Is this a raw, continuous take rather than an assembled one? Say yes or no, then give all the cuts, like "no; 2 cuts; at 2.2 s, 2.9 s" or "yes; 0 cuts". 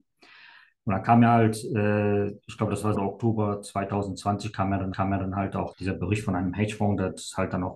no; 4 cuts; at 2.4 s, 2.9 s, 4.9 s, 5.7 s